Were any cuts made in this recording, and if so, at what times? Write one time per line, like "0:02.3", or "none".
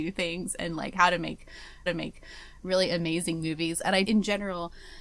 0:01.9
0:04.0